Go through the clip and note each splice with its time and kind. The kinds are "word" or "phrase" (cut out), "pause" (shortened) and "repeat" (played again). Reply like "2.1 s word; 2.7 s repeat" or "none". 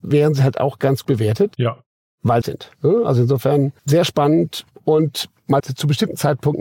1.0 s word; 2.4 s phrase; 3.8 s pause; 5.6 s phrase